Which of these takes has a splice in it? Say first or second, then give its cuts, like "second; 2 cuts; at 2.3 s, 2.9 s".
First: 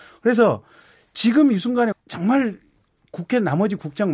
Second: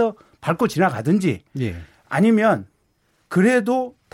first; 1 cut; at 1.9 s